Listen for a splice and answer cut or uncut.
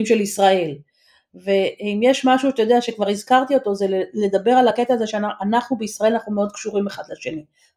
uncut